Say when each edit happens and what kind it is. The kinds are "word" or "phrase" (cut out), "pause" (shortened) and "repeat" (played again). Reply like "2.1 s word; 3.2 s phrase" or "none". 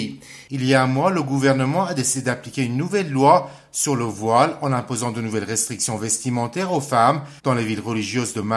7.4 s pause